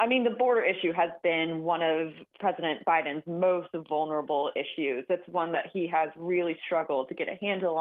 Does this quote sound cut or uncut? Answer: cut